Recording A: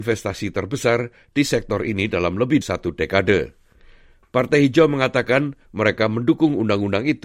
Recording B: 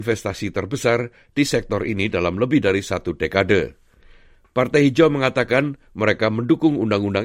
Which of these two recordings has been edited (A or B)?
A